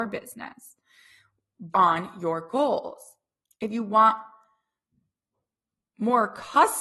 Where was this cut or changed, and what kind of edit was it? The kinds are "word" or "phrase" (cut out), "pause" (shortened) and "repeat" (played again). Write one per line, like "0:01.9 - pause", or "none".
0:01.7 - word
0:03.4 - word